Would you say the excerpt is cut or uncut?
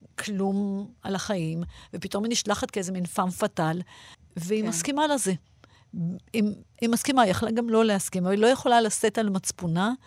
uncut